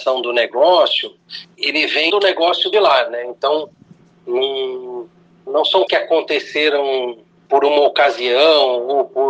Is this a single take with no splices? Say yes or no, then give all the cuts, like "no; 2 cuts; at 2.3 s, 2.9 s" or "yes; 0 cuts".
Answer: no; 6 cuts; at 1.5 s, 2.1 s, 2.7 s, 5.5 s, 5.9 s, 7.5 s